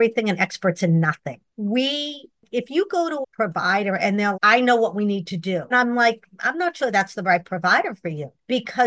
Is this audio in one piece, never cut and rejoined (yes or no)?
no